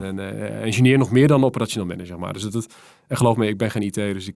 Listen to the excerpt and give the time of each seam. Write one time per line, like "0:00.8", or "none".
none